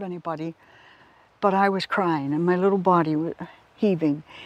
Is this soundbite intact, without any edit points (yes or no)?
yes